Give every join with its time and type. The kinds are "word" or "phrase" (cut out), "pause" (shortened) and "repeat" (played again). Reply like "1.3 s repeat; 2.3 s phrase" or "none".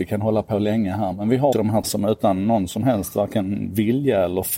1.5 s word; 1.8 s word